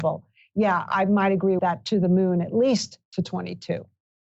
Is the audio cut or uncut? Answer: cut